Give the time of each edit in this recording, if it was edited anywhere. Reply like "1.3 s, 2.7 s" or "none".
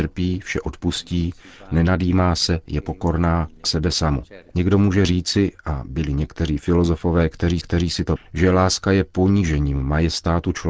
3.6 s, 4.5 s, 7.6 s, 8.2 s